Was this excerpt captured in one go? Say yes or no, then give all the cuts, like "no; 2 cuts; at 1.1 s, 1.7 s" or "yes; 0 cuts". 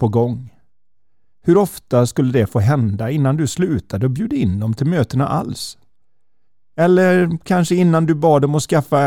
yes; 0 cuts